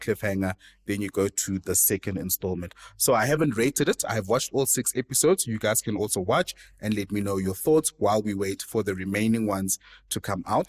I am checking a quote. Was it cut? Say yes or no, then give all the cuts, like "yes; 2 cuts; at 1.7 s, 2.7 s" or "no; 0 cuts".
no; 0 cuts